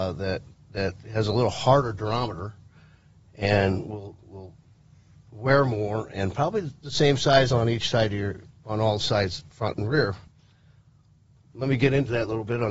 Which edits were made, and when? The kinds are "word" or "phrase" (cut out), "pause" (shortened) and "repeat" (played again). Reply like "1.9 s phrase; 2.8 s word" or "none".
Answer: none